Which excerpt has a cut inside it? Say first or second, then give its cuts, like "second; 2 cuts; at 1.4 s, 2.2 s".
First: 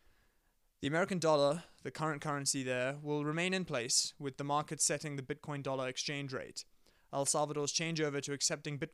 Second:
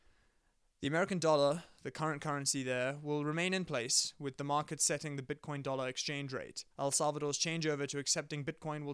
second; 1 cut; at 6.7 s